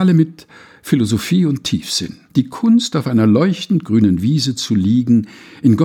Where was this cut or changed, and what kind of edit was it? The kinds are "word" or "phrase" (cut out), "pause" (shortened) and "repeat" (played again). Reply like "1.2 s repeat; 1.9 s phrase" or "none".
2.3 s pause